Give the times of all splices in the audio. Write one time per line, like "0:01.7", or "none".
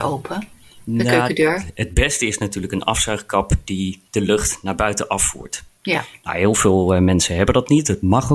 0:04.1